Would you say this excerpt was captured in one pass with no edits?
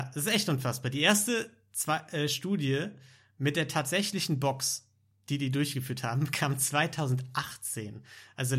yes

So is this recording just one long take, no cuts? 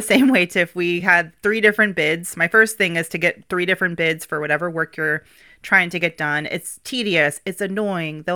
yes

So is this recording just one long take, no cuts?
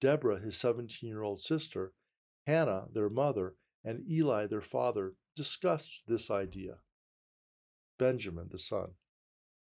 yes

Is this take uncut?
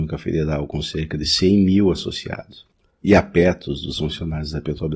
yes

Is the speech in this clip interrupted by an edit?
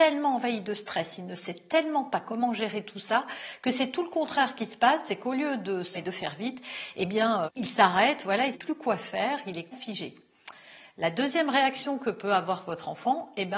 yes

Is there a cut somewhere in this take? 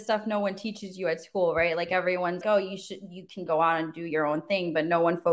yes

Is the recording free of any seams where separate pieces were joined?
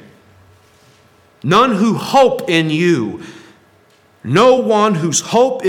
yes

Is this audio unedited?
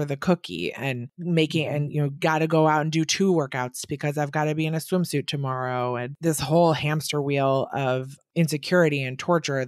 yes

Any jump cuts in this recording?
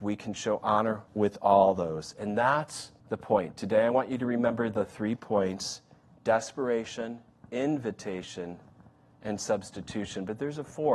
yes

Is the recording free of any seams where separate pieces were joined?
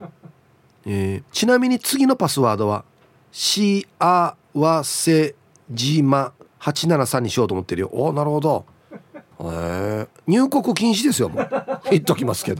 no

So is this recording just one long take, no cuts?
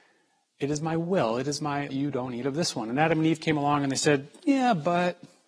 no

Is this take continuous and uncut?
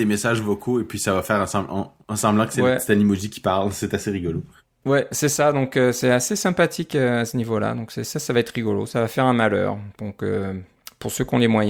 yes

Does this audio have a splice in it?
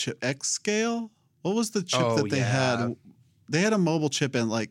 no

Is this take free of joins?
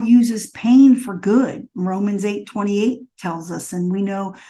yes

